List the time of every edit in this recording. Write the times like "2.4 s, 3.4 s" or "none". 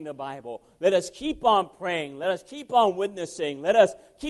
none

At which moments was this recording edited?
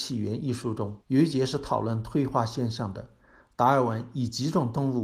1.0 s

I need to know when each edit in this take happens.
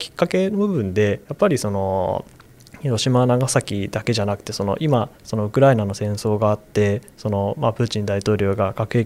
5.2 s

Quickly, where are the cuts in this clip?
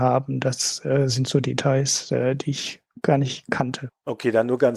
none

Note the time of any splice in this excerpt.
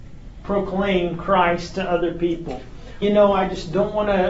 3.0 s

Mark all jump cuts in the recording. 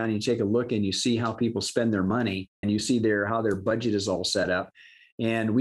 2.6 s

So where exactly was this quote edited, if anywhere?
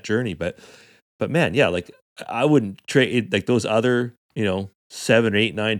none

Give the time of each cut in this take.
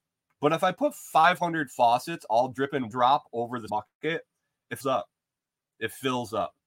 2.9 s, 3.7 s, 4.8 s

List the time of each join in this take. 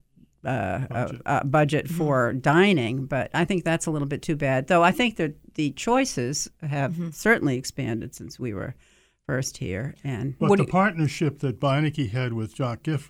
none

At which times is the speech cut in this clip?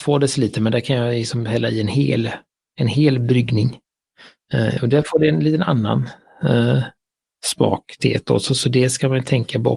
none

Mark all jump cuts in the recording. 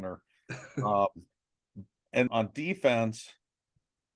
1.3 s, 2.3 s

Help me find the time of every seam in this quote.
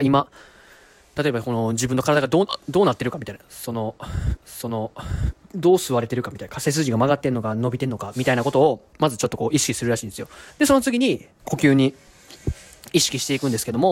4.4 s, 8.9 s, 10.5 s

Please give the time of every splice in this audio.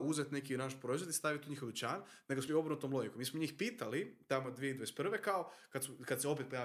2.5 s

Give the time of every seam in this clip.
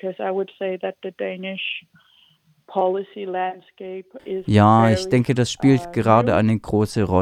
none

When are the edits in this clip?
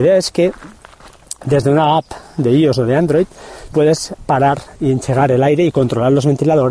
3.7 s

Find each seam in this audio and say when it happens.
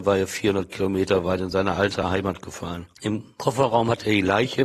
none

